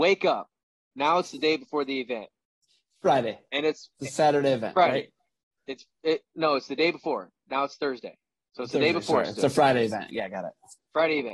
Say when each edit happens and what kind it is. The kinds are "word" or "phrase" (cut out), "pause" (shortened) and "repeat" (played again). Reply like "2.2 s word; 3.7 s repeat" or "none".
none